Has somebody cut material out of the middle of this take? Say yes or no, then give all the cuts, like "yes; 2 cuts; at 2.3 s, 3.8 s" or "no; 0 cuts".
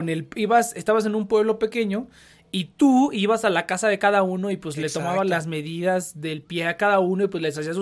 no; 0 cuts